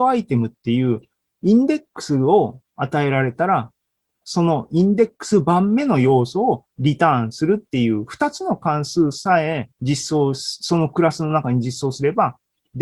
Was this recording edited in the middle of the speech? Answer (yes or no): yes